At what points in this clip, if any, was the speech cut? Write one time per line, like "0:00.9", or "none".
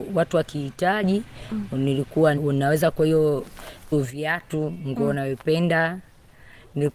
0:02.4
0:02.9
0:03.9